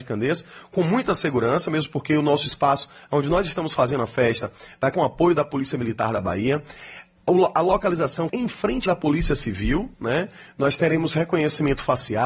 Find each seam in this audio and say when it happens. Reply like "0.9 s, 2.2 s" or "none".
4.9 s, 8.3 s, 8.9 s